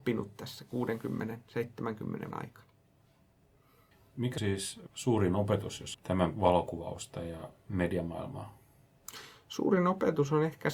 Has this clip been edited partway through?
yes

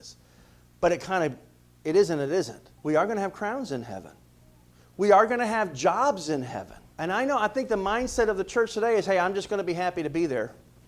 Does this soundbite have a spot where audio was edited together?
yes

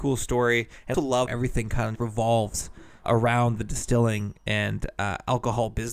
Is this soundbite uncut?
no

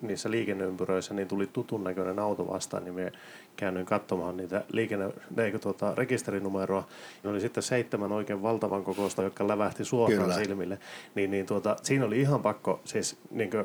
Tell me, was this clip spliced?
yes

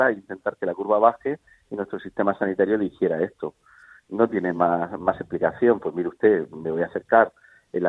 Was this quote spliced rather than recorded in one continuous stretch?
no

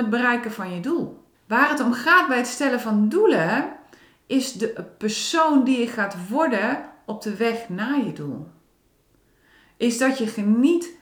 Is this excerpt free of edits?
no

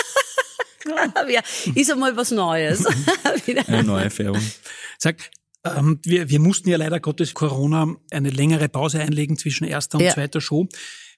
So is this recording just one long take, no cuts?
no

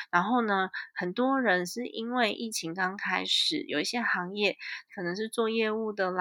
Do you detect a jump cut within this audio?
yes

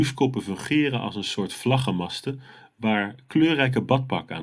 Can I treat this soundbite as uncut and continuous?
yes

